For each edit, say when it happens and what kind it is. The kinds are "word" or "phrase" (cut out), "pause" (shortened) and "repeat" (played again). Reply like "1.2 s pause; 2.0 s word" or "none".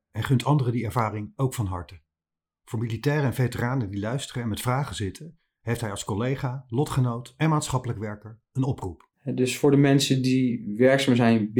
9.1 s pause

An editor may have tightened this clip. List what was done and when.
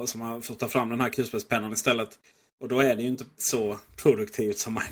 3.4 s word

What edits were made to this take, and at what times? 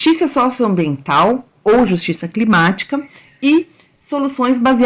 none

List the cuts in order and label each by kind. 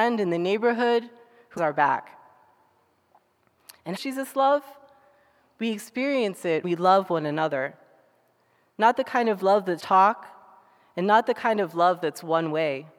1.6 s word; 4.0 s phrase; 6.6 s word; 9.8 s word

